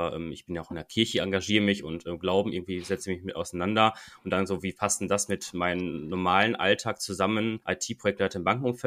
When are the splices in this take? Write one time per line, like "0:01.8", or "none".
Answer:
0:07.6